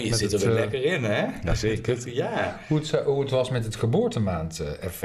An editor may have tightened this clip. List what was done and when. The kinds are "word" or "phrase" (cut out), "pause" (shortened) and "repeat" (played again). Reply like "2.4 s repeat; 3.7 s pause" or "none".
none